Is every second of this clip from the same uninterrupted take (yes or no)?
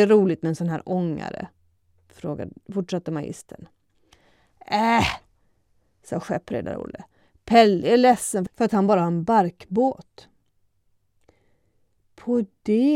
yes